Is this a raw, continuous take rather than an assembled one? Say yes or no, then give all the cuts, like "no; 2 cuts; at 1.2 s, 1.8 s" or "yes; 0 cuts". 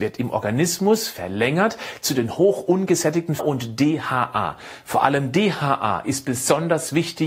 no; 1 cut; at 3.4 s